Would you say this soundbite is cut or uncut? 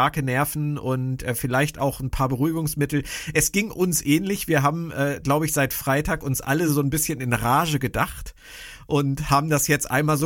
uncut